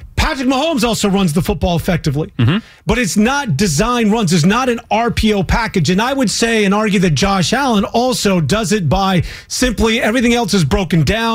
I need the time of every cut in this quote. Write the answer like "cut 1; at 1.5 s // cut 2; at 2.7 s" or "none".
none